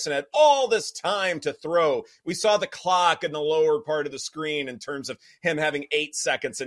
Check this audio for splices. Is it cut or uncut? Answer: uncut